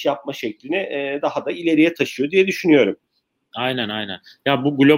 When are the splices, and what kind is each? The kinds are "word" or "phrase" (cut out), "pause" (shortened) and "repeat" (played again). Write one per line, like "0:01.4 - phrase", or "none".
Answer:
none